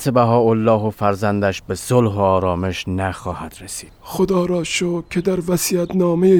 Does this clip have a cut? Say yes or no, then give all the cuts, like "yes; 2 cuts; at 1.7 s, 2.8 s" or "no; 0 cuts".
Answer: yes; 1 cut; at 4.0 s